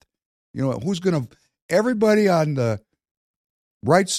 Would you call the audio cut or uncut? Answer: uncut